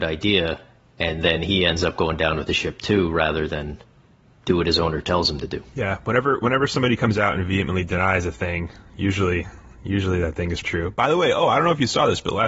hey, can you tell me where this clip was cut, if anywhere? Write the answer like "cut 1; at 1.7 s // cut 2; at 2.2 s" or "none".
cut 1; at 10.6 s